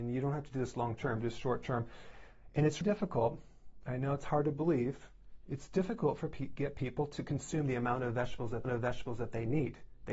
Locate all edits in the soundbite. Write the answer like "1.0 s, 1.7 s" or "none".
2.8 s, 8.6 s